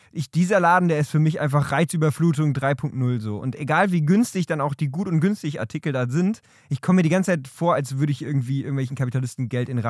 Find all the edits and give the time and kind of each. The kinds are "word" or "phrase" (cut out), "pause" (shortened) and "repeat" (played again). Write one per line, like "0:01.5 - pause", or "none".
none